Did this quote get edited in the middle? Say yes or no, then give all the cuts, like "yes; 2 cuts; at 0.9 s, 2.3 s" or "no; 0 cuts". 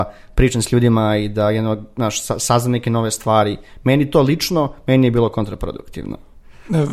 no; 0 cuts